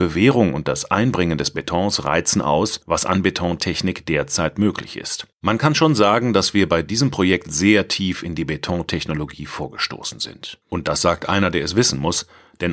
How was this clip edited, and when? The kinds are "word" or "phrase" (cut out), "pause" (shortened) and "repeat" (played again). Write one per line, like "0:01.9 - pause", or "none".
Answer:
0:05.3 - pause
0:10.6 - pause